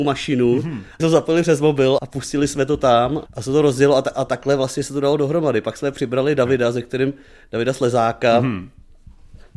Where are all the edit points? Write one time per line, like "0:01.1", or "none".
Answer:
0:01.0
0:02.0
0:03.3